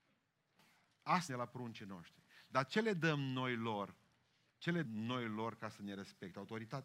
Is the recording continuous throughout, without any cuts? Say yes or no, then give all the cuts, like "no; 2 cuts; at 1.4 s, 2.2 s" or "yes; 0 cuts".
no; 2 cuts; at 1.3 s, 4.8 s